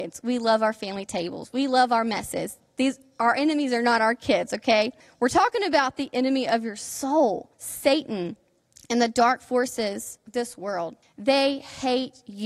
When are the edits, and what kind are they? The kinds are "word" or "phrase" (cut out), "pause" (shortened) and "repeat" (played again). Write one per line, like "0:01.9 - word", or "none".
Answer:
0:05.0 - pause
0:07.5 - pause
0:11.0 - pause

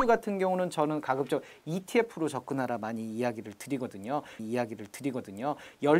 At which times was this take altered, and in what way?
0:04.4 - repeat

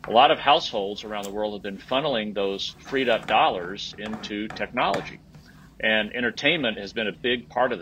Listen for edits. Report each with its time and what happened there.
none

